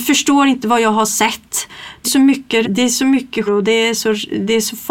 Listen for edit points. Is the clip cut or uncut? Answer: cut